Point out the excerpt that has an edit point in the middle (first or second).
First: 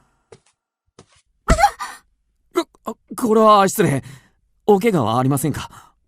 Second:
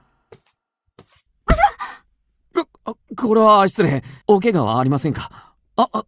second